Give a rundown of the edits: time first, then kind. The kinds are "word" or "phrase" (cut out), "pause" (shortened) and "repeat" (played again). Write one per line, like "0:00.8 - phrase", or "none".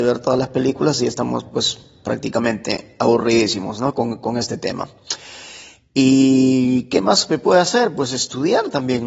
none